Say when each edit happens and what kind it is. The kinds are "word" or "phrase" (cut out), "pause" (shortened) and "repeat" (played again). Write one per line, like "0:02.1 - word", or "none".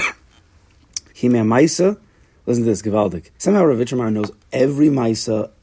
0:01.1 - pause
0:03.3 - pause